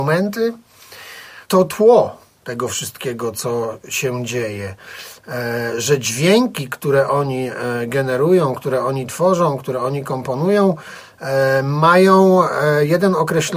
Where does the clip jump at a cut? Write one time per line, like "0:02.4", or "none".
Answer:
0:01.4